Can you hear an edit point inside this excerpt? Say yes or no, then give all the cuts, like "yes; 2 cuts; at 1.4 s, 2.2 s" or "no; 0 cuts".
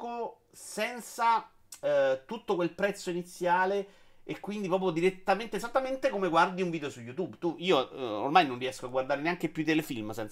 no; 0 cuts